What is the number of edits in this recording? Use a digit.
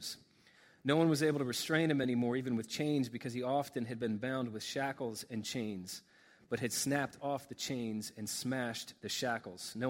0